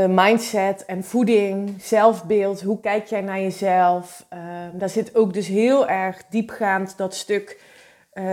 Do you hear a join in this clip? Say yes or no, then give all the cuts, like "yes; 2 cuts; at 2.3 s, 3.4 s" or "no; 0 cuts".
no; 0 cuts